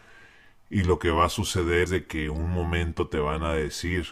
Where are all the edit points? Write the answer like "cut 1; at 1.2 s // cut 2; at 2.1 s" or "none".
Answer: cut 1; at 1.9 s